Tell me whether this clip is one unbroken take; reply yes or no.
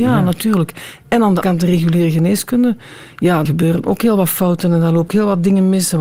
no